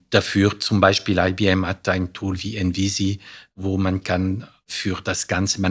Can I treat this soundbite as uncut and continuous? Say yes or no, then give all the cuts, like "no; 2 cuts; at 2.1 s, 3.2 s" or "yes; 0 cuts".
yes; 0 cuts